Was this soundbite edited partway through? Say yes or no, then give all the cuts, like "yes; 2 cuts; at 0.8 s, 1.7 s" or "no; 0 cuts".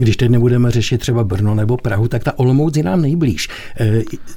no; 0 cuts